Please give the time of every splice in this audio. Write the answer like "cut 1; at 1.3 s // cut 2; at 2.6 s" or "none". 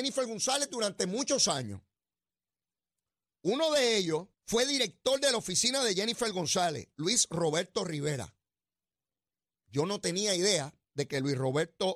cut 1; at 4.3 s